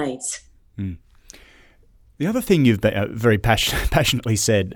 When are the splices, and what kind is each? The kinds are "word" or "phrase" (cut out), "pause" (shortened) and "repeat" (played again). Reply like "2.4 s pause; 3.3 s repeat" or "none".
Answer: none